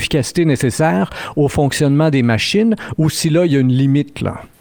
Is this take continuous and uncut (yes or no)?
yes